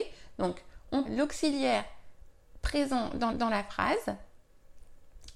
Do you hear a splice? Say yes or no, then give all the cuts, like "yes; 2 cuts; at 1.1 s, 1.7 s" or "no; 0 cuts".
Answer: yes; 2 cuts; at 1.0 s, 3.3 s